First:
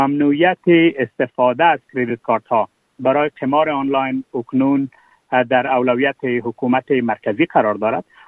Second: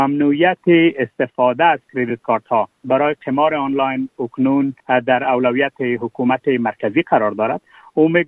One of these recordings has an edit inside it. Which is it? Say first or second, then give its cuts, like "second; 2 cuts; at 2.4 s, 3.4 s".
second; 2 cuts; at 2.7 s, 4.8 s